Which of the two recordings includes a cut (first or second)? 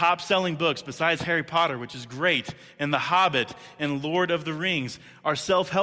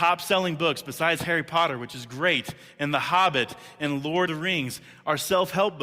second